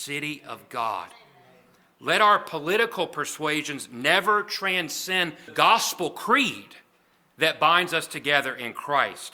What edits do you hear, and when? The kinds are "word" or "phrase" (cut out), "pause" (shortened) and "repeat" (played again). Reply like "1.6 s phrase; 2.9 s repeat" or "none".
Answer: 5.5 s word